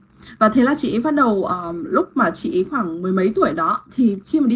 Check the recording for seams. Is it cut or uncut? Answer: uncut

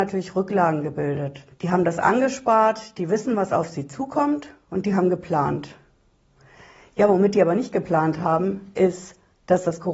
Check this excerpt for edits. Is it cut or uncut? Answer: cut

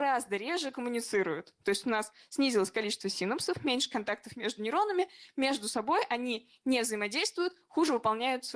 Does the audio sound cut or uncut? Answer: uncut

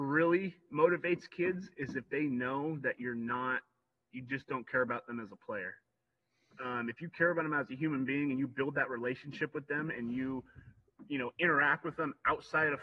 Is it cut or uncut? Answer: uncut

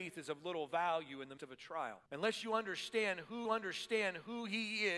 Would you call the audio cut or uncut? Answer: cut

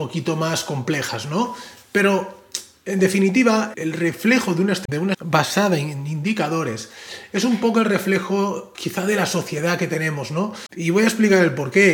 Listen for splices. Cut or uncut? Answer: cut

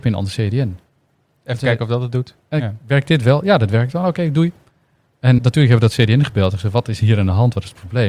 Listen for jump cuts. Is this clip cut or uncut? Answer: cut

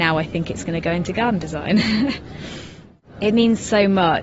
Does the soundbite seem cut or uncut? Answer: uncut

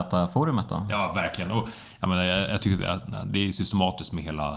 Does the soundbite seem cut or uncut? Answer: uncut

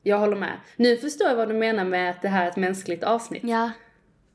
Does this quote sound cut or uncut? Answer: uncut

